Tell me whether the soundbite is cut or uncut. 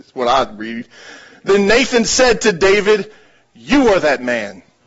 uncut